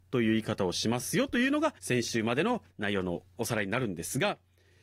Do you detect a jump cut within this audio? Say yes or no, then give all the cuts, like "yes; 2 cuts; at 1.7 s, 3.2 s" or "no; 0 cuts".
yes; 2 cuts; at 1.8 s, 2.7 s